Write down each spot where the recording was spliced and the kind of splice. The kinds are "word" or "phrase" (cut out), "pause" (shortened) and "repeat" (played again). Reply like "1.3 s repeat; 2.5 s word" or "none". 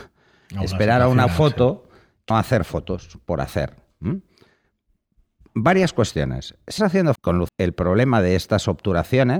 1.3 s word; 2.3 s word; 6.8 s word; 7.2 s word; 7.5 s word